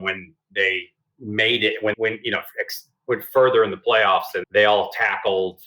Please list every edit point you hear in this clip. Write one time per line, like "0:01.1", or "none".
0:01.9
0:04.4

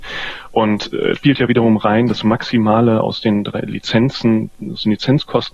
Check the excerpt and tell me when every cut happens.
0:01.2

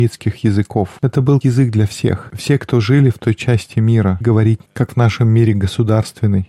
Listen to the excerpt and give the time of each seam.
0:01.4
0:04.2
0:04.7

